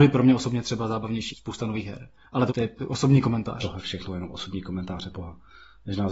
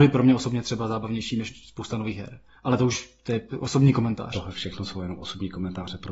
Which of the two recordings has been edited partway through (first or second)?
first